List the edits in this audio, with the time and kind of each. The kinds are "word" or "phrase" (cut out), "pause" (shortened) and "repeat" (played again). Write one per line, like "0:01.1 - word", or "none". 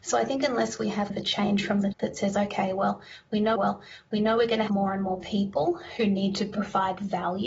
0:01.1 - word
0:01.9 - word
0:03.6 - repeat
0:04.7 - word

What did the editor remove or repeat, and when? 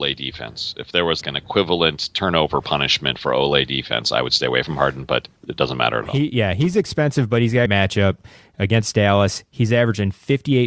0:01.2 - word
0:05.4 - pause
0:07.7 - phrase

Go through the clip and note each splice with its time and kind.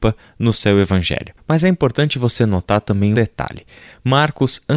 0:03.1 - phrase

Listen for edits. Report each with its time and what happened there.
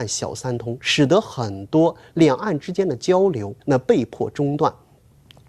0:03.6 - pause

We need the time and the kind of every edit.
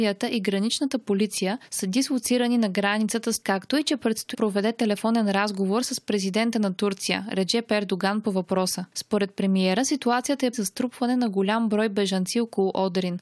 0:03.4 - word
0:04.3 - word
0:10.5 - phrase

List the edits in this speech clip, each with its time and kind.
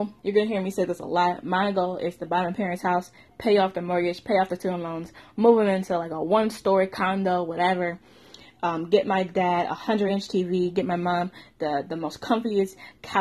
none

